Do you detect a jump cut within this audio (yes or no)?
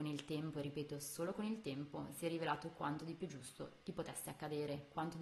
no